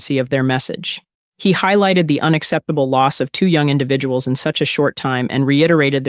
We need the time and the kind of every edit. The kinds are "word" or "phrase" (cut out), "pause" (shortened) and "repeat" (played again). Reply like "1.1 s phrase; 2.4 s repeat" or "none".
none

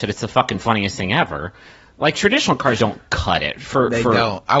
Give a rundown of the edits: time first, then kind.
2.1 s word; 2.8 s word

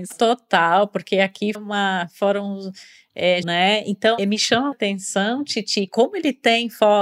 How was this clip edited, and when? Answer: 1.5 s word; 3.4 s phrase; 4.2 s word; 4.7 s word; 5.9 s word

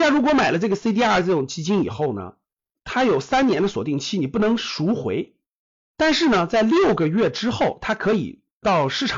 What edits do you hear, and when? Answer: none

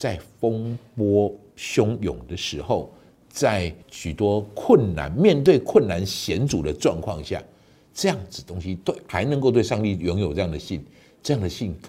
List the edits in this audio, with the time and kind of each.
3.8 s pause

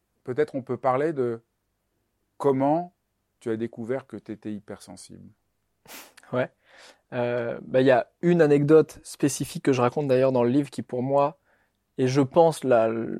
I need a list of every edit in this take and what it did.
none

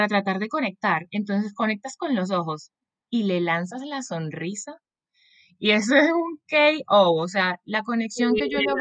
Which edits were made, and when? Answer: none

